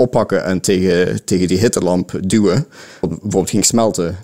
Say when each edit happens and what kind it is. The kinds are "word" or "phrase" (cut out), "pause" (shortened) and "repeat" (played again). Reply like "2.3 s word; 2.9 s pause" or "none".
3.0 s word